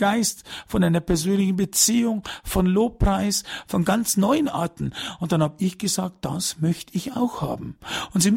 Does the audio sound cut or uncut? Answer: uncut